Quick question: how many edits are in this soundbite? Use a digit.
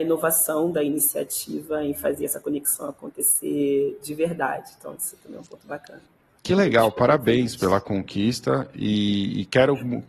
0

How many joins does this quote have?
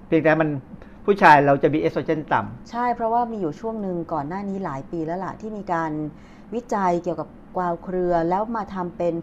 0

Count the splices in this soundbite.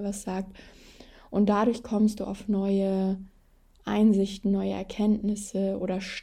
0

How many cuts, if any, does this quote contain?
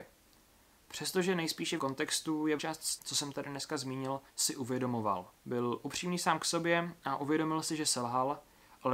5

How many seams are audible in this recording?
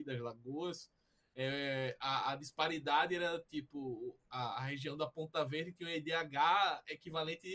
0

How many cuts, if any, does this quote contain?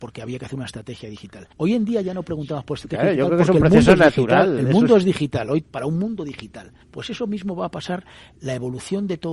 3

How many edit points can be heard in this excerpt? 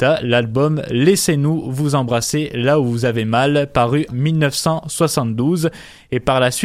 1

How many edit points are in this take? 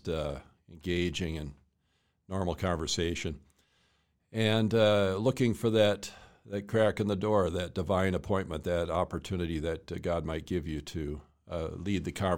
0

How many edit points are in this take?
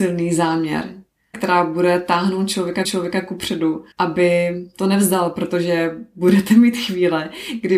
3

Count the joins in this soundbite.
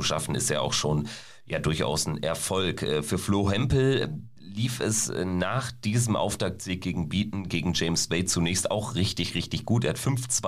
1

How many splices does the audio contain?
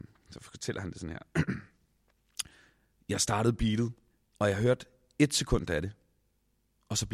1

